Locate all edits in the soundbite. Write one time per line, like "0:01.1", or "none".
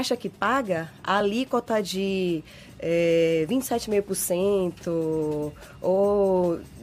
none